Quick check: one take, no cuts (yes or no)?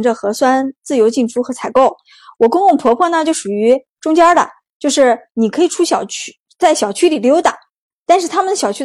yes